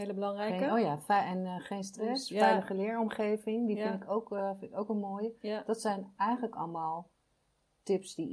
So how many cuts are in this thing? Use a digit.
0